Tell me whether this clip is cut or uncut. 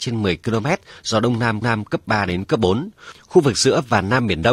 cut